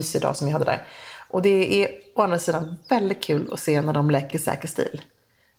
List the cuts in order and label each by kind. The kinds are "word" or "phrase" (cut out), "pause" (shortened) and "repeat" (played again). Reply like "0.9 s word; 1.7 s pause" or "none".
4.3 s word